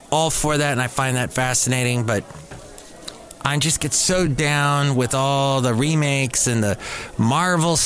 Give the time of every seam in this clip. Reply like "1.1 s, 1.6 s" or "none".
none

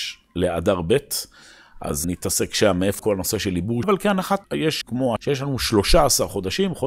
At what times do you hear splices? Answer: 2.0 s, 3.0 s, 3.8 s, 4.4 s, 4.8 s, 5.2 s

